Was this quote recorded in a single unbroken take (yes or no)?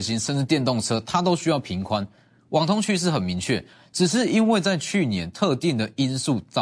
yes